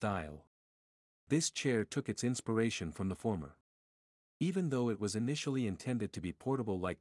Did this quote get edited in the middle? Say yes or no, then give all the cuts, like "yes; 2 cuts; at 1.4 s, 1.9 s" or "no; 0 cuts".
no; 0 cuts